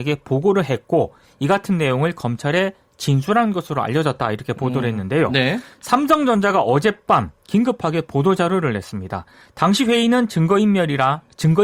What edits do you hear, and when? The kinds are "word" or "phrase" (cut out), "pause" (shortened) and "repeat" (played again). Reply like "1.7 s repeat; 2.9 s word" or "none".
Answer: none

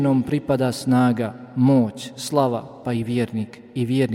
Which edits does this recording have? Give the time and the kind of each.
2.8 s word

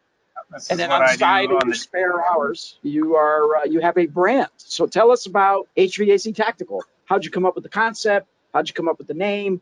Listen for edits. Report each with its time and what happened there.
3.6 s word; 5.7 s pause

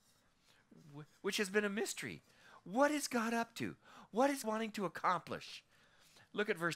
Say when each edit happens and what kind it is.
4.4 s word

